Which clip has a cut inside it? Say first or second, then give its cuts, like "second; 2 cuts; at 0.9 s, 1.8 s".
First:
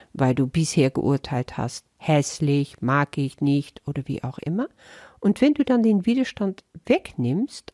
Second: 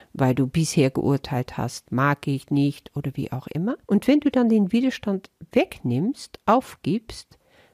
second; 2 cuts; at 1.9 s, 3.8 s